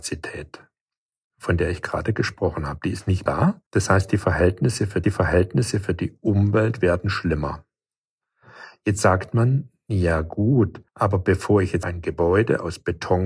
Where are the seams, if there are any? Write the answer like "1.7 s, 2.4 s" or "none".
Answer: 3.3 s, 3.7 s, 5.0 s, 10.9 s, 11.8 s